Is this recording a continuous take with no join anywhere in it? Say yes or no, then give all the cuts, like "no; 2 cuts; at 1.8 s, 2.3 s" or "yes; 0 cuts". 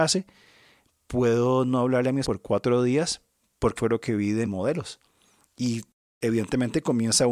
no; 3 cuts; at 2.2 s, 3.8 s, 4.4 s